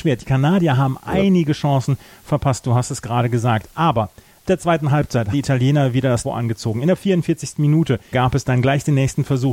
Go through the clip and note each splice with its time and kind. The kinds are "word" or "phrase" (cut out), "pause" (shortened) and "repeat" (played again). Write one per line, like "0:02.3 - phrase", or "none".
0:04.5 - word
0:05.3 - word
0:06.2 - word
0:08.1 - word